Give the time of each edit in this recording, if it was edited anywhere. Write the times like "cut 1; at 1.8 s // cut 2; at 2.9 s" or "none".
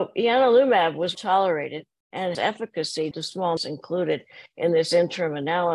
cut 1; at 1.1 s // cut 2; at 2.3 s // cut 3; at 3.1 s // cut 4; at 3.6 s